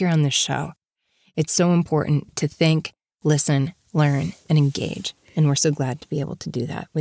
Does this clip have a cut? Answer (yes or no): no